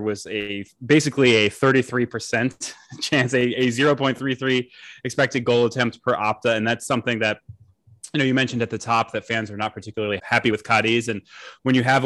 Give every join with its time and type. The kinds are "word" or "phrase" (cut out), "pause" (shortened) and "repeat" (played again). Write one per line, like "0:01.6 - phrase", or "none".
0:10.2 - word